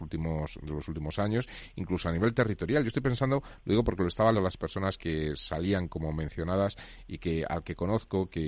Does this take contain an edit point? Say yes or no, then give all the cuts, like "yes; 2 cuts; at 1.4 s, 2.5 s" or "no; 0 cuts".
yes; 2 cuts; at 4.3 s, 5.0 s